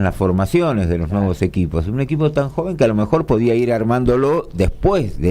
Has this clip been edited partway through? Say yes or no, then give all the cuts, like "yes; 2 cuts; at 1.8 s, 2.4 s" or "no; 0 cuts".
no; 0 cuts